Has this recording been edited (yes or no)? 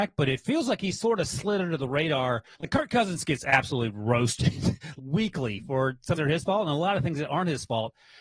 yes